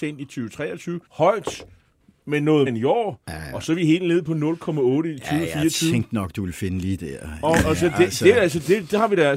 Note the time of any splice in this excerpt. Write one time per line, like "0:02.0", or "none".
0:01.1
0:02.7
0:07.0

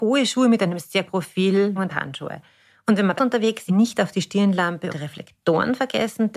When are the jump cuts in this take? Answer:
0:01.1
0:01.8
0:03.2
0:03.7
0:04.9

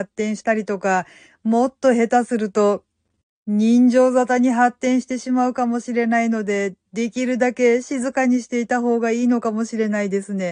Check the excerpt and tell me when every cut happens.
none

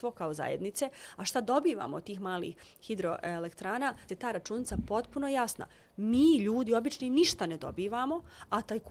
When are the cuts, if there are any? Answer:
0:04.1

